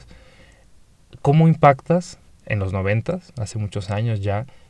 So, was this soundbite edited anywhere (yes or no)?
no